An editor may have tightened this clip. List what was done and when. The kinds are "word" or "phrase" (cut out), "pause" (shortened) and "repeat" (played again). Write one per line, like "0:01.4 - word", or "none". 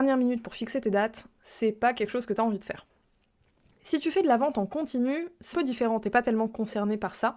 0:05.5 - word